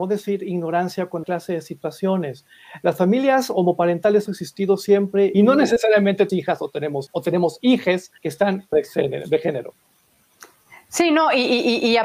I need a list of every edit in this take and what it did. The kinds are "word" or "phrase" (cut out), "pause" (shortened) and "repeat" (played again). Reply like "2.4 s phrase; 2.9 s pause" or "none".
1.2 s phrase; 4.3 s word; 5.3 s phrase; 6.3 s word; 7.1 s word; 8.2 s pause; 8.7 s phrase